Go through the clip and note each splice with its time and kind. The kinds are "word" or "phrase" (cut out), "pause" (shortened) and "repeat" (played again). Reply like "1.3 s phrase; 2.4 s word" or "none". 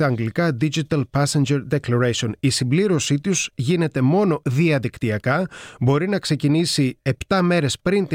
none